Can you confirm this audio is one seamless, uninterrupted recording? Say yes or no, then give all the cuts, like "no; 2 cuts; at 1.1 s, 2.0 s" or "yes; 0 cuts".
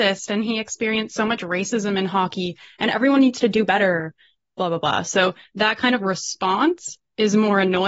yes; 0 cuts